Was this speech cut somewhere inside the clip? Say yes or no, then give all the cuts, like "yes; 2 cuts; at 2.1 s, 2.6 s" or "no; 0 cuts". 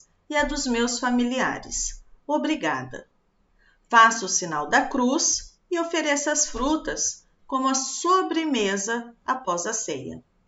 no; 0 cuts